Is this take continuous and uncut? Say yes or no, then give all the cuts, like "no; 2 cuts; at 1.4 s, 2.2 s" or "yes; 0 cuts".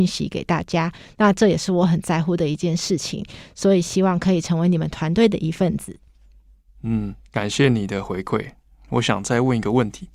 yes; 0 cuts